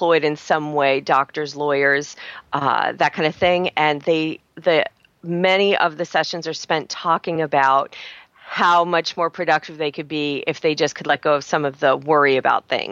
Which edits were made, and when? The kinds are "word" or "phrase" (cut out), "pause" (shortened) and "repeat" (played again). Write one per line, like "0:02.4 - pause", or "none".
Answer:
none